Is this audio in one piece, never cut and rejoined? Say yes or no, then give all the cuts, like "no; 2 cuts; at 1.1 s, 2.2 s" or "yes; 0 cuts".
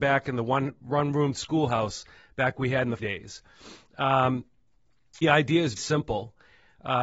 no; 3 cuts; at 3.0 s, 5.2 s, 5.8 s